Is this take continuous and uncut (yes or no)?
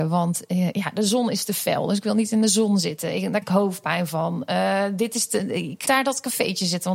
no